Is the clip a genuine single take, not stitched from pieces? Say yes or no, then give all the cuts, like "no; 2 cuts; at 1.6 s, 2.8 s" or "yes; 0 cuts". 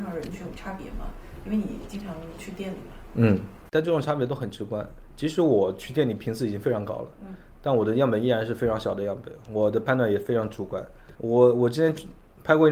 no; 2 cuts; at 3.7 s, 11.2 s